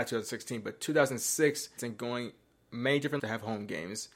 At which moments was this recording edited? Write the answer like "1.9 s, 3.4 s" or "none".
1.8 s, 3.2 s

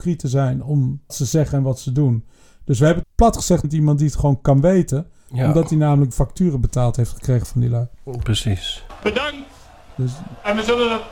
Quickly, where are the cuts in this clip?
1.1 s, 3.0 s, 3.6 s, 6.1 s

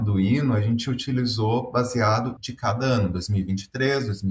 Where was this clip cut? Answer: 2.4 s

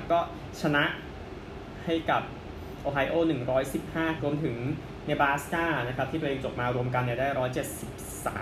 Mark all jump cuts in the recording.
4.2 s

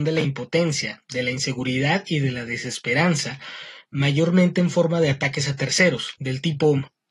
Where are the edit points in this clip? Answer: none

